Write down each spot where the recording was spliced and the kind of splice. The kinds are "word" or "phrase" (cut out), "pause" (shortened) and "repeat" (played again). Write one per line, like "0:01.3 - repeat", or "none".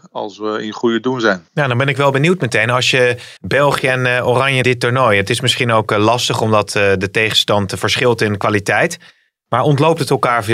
0:01.5 - pause
0:03.4 - pause
0:04.6 - phrase